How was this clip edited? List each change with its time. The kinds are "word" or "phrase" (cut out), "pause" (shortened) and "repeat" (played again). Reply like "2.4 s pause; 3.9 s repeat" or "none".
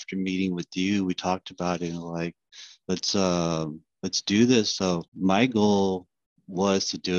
5.1 s pause